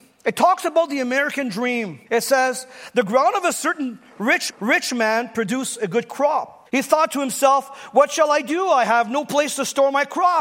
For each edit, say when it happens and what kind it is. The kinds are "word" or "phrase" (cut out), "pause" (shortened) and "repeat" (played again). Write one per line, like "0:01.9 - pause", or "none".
0:02.1 - pause
0:04.5 - repeat
0:06.7 - pause